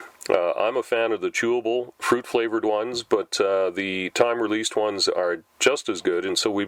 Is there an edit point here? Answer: no; 0 cuts

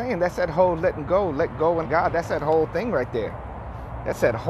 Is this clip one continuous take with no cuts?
no; 1 cut; at 1.8 s

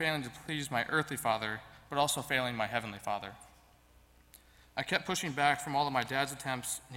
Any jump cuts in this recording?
no; 0 cuts

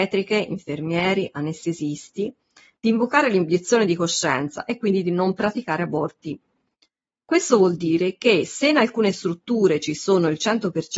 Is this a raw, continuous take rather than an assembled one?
yes; 0 cuts

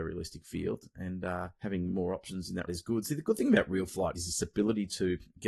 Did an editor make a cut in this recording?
yes; 3 cuts; at 1.6 s, 2.7 s, 4.1 s

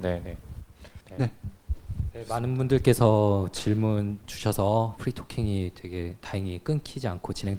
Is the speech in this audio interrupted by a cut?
yes; 2 cuts; at 1.1 s, 5.0 s

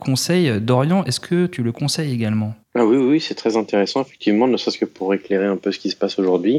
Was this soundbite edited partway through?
yes; 1 cut; at 2.6 s

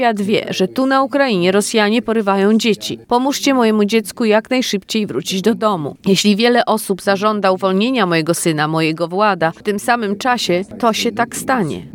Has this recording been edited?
no; 0 cuts

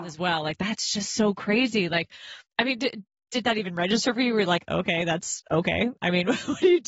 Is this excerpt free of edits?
yes; 0 cuts

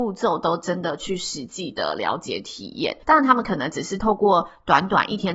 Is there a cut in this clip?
yes; 1 cut; at 3.0 s

